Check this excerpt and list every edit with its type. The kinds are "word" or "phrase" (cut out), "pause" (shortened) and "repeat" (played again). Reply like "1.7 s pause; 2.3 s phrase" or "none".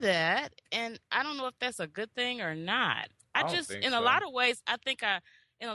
none